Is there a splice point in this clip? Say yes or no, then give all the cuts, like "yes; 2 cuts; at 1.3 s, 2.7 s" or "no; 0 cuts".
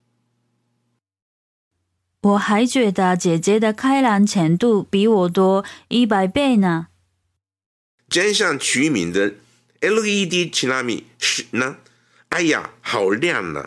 no; 0 cuts